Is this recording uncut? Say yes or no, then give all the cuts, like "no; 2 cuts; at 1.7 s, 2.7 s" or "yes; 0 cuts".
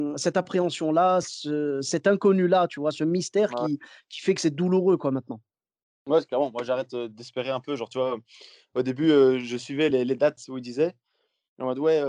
yes; 0 cuts